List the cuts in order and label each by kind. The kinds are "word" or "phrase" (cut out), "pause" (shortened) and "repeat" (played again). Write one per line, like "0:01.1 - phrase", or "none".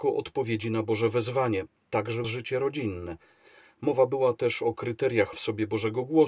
0:02.2 - word
0:05.3 - word